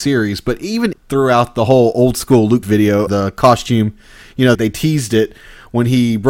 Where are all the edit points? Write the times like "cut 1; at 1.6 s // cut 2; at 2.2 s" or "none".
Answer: cut 1; at 0.9 s // cut 2; at 2.6 s // cut 3; at 3.1 s // cut 4; at 4.5 s